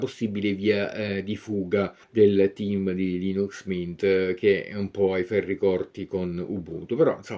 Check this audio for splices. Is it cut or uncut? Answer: cut